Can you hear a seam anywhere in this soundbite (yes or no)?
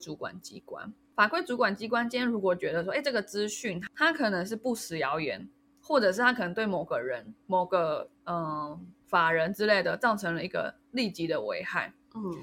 yes